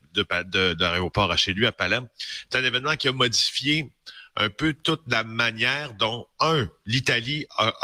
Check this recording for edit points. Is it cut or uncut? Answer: uncut